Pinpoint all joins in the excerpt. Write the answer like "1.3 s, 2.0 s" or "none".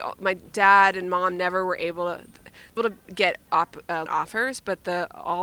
2.8 s, 4.1 s